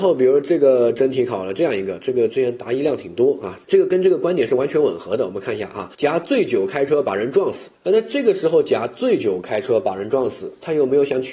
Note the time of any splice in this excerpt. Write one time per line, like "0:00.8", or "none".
0:03.6
0:05.9
0:07.8